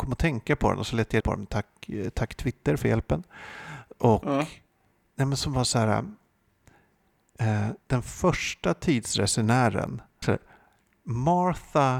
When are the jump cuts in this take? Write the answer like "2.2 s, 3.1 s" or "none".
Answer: 1.2 s, 7.8 s, 10.2 s